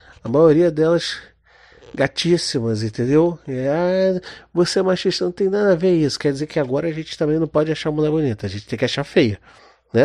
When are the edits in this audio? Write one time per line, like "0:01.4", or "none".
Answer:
none